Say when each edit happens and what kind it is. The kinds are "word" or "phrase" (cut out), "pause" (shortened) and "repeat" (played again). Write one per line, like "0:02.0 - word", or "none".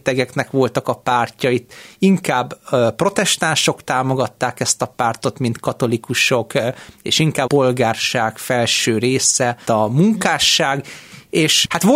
0:07.5 - word
0:09.7 - word